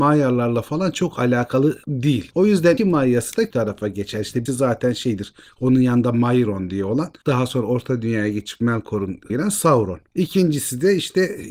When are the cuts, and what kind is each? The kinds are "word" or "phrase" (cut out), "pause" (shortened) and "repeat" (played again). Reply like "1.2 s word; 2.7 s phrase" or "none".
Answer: 2.8 s word; 3.5 s word; 4.5 s word; 9.3 s word